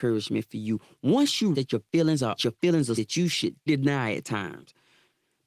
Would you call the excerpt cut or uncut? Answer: cut